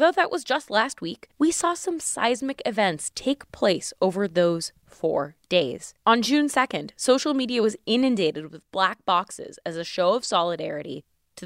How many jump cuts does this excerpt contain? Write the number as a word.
two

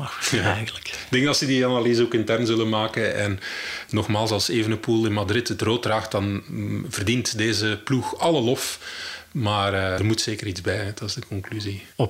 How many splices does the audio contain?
one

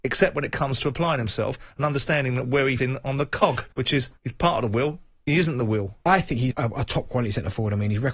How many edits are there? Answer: four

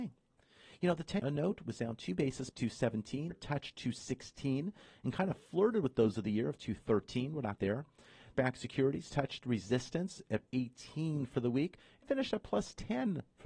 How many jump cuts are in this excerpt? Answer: eight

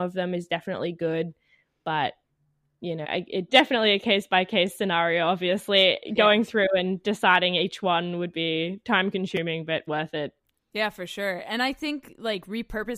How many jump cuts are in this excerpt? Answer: three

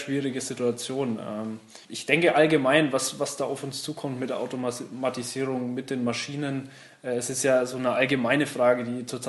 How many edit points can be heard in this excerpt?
one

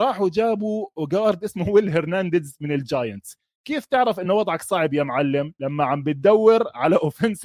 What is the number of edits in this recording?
zero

